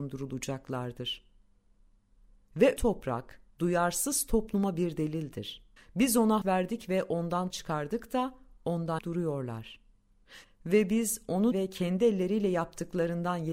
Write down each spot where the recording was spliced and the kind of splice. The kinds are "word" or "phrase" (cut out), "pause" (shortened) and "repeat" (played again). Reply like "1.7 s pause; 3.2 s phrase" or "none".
2.8 s word; 3.5 s pause; 5.8 s pause; 6.4 s word; 7.5 s word; 9.0 s word; 11.5 s word